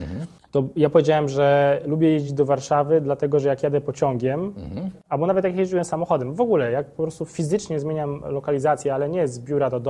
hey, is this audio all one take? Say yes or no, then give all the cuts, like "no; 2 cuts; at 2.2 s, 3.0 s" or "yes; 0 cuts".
yes; 0 cuts